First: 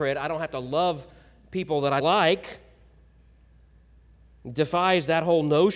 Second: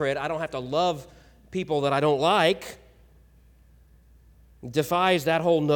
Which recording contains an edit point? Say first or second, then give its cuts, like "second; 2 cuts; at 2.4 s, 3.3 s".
first; 1 cut; at 2.0 s